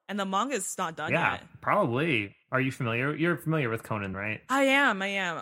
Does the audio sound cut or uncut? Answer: cut